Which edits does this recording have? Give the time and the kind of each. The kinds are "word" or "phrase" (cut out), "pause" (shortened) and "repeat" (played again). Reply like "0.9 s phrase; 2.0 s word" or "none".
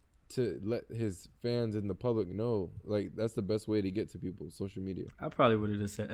none